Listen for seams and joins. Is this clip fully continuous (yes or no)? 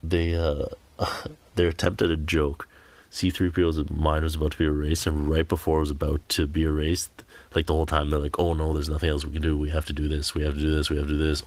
yes